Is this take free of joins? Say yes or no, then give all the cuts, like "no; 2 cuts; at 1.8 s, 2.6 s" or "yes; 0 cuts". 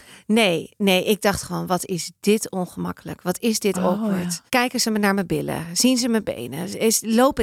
no; 1 cut; at 4.5 s